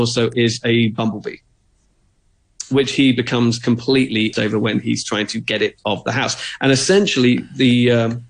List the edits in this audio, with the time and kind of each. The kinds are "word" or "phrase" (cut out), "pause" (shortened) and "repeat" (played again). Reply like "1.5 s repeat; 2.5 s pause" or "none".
4.3 s word; 5.8 s word